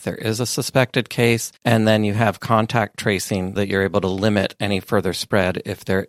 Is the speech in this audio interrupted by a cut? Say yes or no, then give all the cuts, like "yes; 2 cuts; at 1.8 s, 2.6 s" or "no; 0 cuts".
yes; 2 cuts; at 1.6 s, 3.6 s